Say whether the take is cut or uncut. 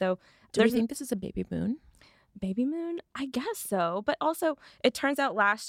uncut